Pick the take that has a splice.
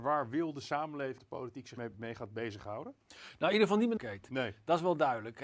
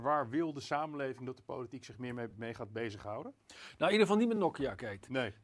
first; 3 cuts; at 1.2 s, 1.8 s, 4.0 s

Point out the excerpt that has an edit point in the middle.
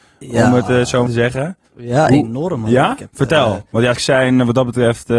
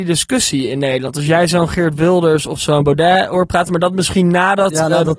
first; 4 cuts; at 1.1 s, 1.6 s, 3.1 s, 3.9 s

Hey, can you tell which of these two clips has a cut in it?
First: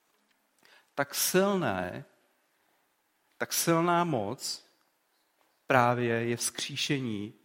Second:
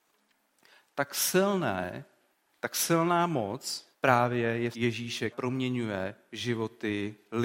second; 4 cuts; at 2.3 s, 3.9 s, 4.7 s, 5.3 s

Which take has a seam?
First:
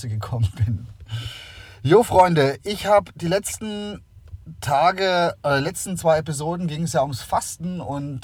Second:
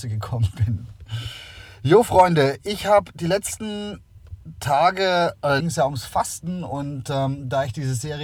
second; 1 cut; at 5.6 s

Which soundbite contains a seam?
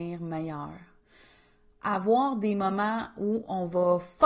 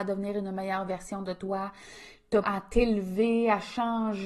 second; 1 cut; at 2.4 s

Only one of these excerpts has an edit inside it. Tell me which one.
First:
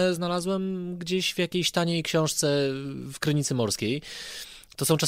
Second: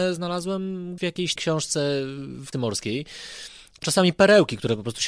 second; 4 cuts; at 1.0 s, 1.4 s, 2.5 s, 3.8 s

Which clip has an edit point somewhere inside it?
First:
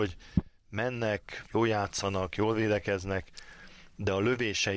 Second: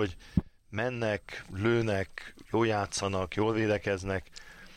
first; 1 cut; at 1.5 s

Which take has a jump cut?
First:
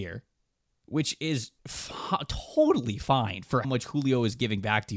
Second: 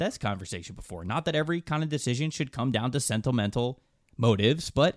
first; 2 cuts; at 1.6 s, 3.6 s

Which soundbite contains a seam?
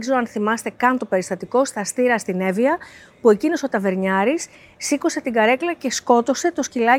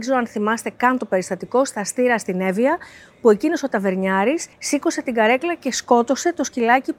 second; 1 cut; at 4.5 s

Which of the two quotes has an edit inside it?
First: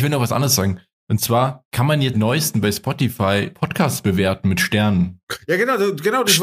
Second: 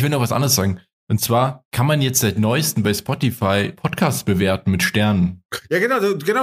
first; 1 cut; at 2.1 s

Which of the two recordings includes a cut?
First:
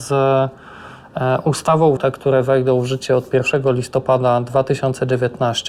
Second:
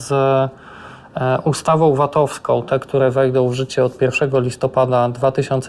first; 1 cut; at 2.0 s

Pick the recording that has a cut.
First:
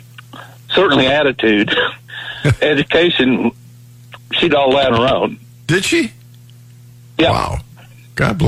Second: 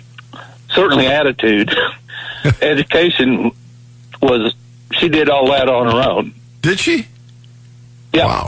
first; 3 cuts; at 4.2 s, 4.5 s, 4.9 s

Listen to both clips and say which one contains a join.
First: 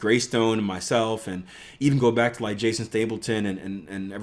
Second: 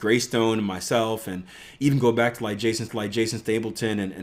second; 1 cut; at 2.9 s

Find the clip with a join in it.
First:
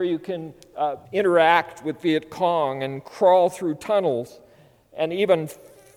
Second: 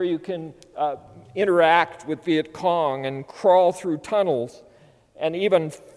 first; 1 cut; at 1.0 s

